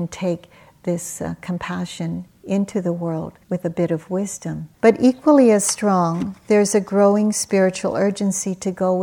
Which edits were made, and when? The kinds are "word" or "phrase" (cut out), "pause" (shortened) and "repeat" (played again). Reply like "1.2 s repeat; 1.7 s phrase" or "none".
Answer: 3.4 s pause; 4.7 s pause